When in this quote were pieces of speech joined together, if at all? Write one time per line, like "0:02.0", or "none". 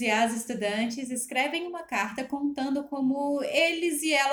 none